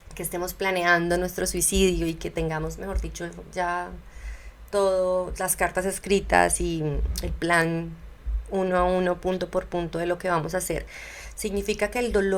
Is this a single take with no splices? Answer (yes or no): yes